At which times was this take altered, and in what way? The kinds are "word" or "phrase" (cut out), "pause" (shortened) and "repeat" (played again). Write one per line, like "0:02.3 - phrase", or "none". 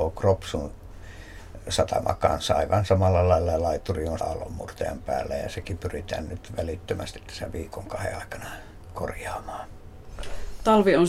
0:04.2 - word